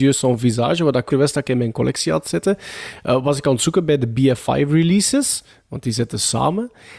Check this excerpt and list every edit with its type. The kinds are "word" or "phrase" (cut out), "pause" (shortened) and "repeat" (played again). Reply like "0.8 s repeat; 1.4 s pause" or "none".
1.1 s word